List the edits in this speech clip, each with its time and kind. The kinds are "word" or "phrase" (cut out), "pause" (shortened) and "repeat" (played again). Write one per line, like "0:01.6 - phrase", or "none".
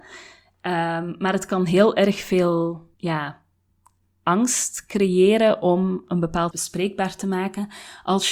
0:02.9 - pause
0:06.5 - phrase